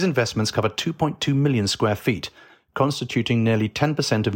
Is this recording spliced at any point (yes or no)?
no